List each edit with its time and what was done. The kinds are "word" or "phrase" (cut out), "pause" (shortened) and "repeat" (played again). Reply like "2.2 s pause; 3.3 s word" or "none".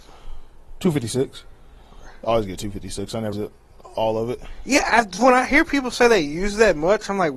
3.3 s word